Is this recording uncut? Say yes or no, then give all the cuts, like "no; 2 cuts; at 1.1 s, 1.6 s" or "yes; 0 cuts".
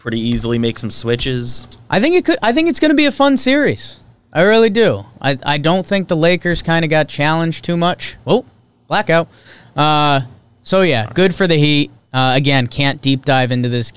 yes; 0 cuts